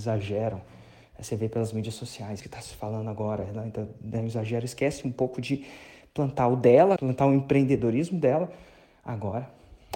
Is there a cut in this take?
yes; 2 cuts; at 2.4 s, 7.0 s

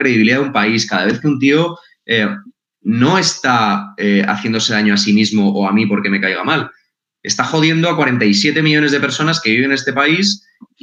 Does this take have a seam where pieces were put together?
no; 0 cuts

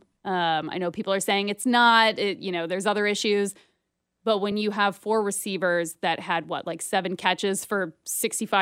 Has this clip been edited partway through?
no; 0 cuts

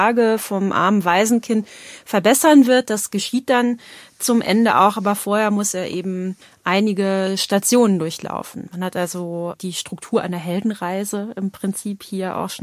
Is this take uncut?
yes; 0 cuts

